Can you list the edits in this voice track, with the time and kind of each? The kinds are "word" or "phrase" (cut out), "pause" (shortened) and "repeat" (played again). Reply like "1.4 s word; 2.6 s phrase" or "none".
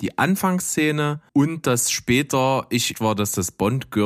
1.3 s pause; 2.9 s word